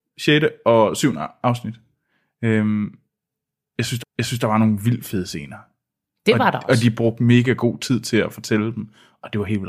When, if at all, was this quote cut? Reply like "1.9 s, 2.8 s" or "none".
4.0 s